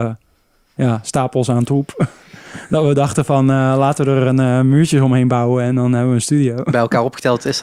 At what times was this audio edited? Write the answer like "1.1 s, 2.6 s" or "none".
none